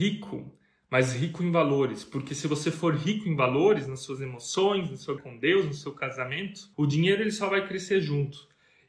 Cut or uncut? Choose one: cut